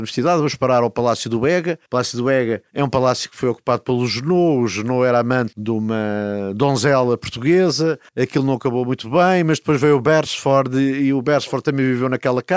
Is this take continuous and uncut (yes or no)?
no